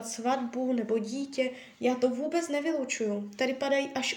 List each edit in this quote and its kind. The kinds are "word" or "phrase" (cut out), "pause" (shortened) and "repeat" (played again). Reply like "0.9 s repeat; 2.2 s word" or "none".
none